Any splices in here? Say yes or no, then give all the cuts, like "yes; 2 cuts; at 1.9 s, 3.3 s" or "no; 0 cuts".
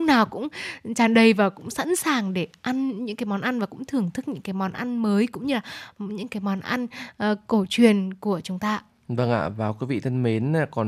no; 0 cuts